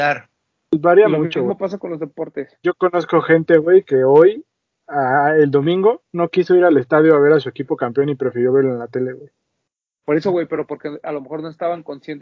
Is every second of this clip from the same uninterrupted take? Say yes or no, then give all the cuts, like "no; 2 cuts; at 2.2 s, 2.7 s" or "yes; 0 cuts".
yes; 0 cuts